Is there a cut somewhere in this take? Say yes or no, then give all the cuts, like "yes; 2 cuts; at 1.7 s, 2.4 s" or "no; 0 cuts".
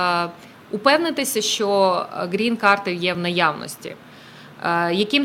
no; 0 cuts